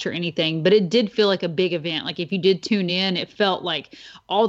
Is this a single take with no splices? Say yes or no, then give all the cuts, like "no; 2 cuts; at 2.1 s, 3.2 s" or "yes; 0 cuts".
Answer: yes; 0 cuts